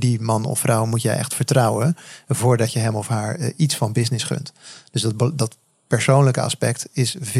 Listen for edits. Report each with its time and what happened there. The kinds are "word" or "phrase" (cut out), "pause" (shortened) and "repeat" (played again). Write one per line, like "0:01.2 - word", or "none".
none